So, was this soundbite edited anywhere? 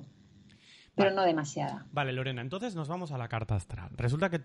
no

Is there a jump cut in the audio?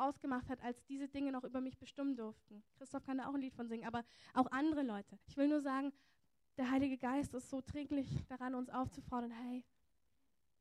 yes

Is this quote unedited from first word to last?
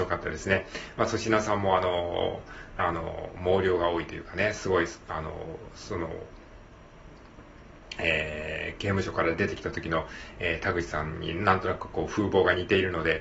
no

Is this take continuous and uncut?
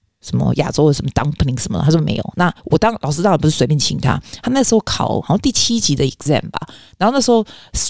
yes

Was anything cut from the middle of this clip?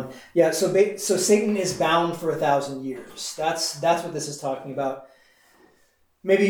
no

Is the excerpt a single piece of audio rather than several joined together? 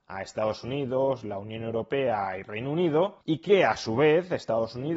no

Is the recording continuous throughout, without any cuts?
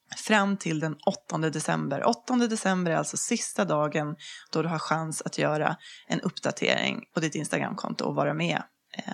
yes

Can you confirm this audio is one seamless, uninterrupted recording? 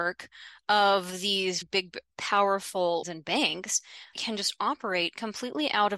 no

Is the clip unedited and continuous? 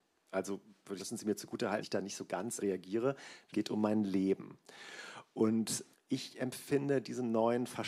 no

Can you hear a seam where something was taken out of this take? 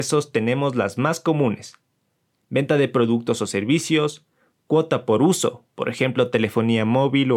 no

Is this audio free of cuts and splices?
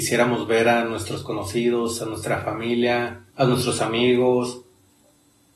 no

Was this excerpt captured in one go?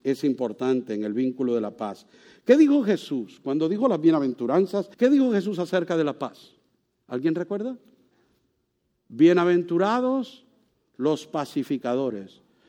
no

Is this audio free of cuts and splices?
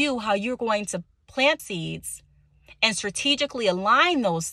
no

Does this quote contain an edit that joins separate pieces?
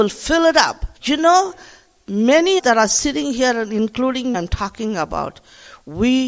yes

